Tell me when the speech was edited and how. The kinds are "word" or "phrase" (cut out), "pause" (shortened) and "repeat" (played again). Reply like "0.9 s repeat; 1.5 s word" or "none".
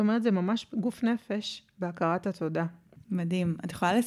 none